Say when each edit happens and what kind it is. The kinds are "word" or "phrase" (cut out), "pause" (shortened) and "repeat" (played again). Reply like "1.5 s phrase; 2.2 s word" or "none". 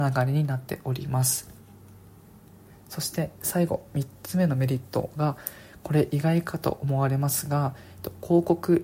none